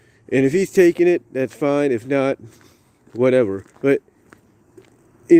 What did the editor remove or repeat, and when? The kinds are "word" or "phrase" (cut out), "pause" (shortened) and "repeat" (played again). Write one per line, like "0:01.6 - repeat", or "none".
0:03.7 - pause